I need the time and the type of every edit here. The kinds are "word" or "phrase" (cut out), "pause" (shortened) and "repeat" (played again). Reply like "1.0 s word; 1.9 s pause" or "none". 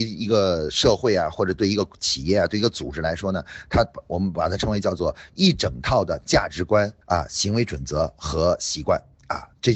7.0 s pause